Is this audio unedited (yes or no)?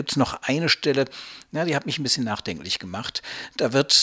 yes